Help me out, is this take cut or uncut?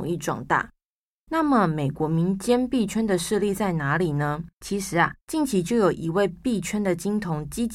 cut